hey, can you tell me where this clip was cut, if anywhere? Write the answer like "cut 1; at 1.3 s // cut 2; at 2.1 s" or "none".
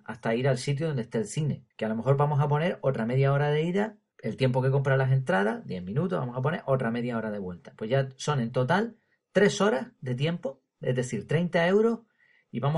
cut 1; at 1.7 s

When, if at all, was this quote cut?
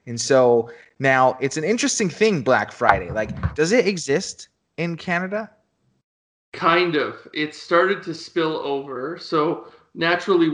none

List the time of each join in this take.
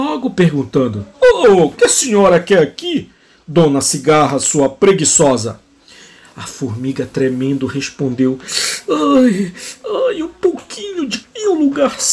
cut 1; at 1.1 s // cut 2; at 1.7 s // cut 3; at 11.2 s

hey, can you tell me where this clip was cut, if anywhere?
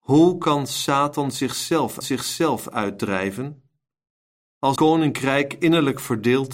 cut 1; at 2.0 s // cut 2; at 4.8 s

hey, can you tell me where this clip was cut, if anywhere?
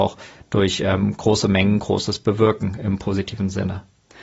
none

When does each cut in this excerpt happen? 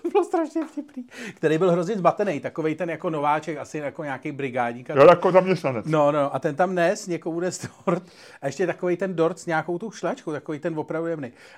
none

